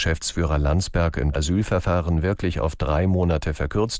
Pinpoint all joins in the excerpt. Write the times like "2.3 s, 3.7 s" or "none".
1.3 s